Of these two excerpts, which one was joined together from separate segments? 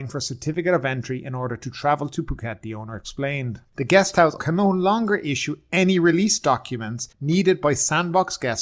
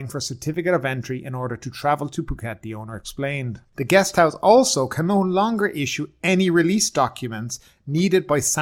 first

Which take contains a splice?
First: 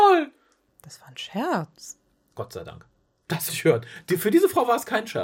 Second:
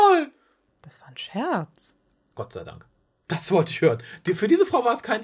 first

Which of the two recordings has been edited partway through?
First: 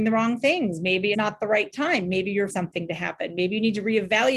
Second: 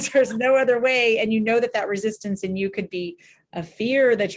first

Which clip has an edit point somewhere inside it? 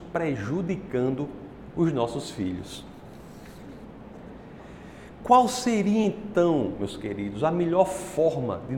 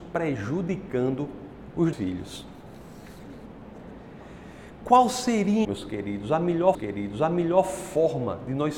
second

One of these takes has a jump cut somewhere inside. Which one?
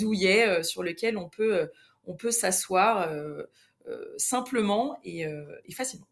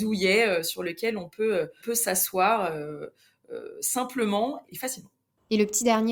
second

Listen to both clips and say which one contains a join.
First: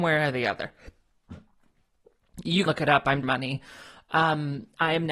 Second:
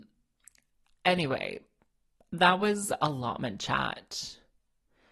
first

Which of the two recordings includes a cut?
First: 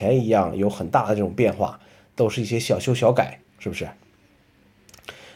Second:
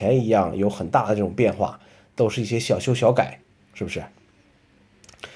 first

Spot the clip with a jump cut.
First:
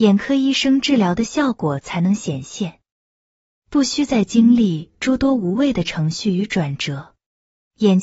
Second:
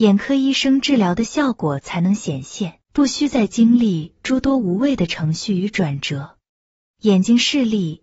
second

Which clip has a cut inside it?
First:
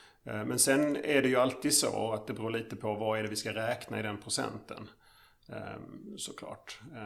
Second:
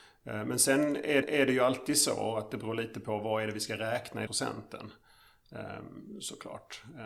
second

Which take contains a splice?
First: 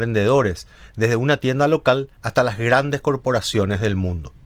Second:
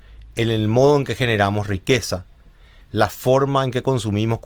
first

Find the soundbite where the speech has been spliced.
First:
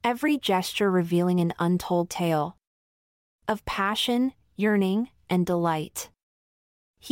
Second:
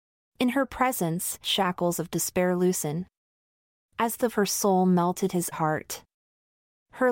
second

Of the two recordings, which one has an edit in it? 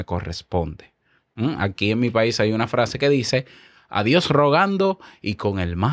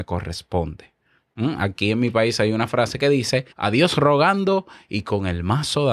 second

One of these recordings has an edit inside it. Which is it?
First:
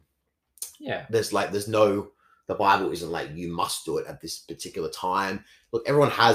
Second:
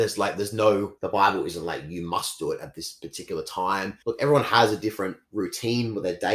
second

